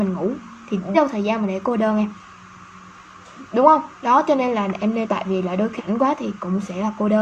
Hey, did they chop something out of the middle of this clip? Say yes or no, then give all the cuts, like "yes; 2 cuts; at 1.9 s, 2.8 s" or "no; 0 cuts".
yes; 3 cuts; at 0.9 s, 5.0 s, 5.8 s